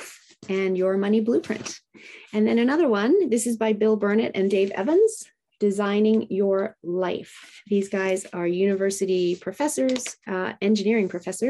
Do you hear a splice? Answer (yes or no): no